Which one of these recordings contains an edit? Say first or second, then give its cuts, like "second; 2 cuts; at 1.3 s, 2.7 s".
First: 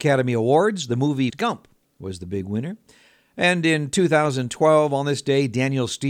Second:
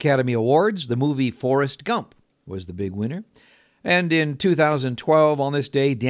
first; 1 cut; at 1.3 s